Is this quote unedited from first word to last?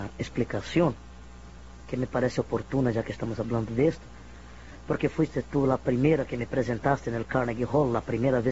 yes; 0 cuts

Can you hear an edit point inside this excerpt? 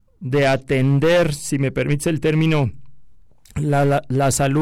no; 0 cuts

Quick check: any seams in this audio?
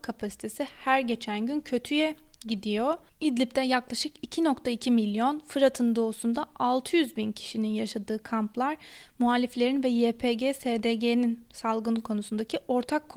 no; 0 cuts

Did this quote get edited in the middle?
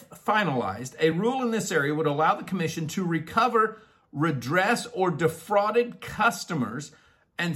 no; 0 cuts

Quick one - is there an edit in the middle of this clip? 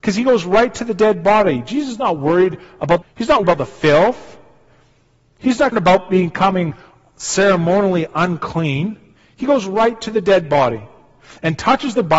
yes; 3 cuts; at 3.0 s, 3.4 s, 5.7 s

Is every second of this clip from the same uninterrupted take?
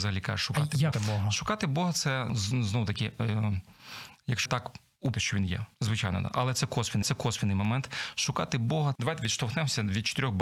no; 7 cuts; at 0.9 s, 2.3 s, 4.5 s, 5.1 s, 5.7 s, 7.0 s, 9.0 s

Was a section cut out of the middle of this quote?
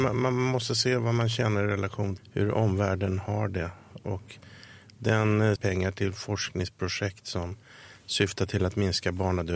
yes; 2 cuts; at 2.2 s, 5.6 s

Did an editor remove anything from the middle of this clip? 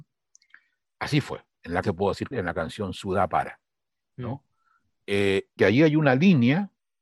yes; 3 cuts; at 1.8 s, 2.3 s, 5.6 s

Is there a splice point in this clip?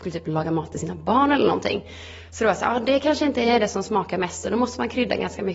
no; 0 cuts

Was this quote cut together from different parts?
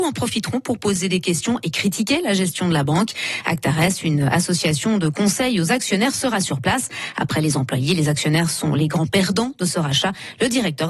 no; 0 cuts

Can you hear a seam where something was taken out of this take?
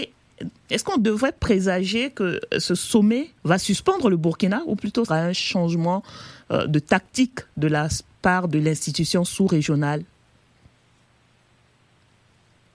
yes; 2 cuts; at 3.4 s, 5.1 s

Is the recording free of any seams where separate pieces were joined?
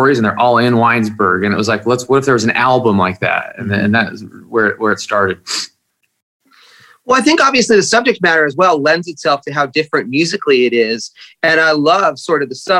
yes; 0 cuts

